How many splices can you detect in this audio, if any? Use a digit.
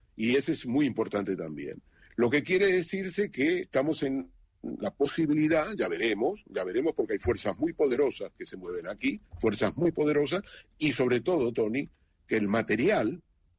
2